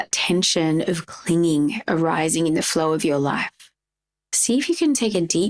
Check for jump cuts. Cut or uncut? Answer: uncut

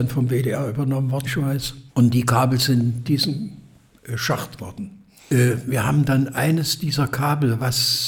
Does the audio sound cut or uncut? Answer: cut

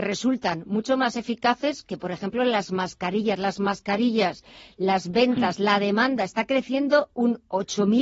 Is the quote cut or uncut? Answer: uncut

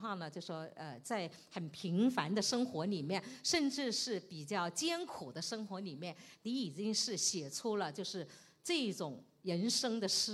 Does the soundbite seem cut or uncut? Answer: uncut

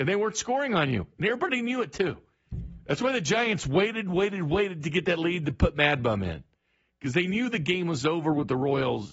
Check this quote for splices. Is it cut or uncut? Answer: uncut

